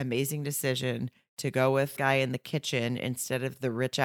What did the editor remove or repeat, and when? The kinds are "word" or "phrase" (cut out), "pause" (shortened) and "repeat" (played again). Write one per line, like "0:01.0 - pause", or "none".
0:02.0 - phrase